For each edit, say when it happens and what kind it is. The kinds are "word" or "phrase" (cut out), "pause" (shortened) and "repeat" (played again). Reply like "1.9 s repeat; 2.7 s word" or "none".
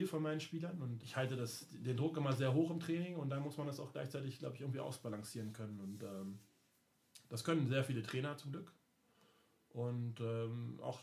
1.0 s word